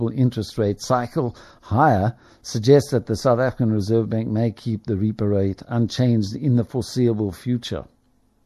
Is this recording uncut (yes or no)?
yes